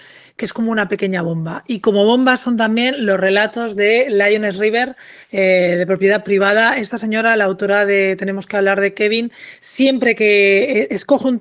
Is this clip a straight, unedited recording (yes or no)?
no